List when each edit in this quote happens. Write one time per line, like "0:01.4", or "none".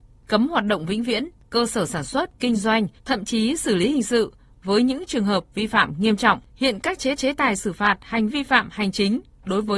0:03.0
0:06.5
0:07.2
0:08.3